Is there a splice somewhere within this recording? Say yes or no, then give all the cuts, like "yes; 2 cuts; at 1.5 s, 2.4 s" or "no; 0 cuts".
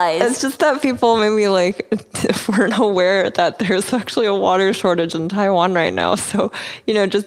no; 0 cuts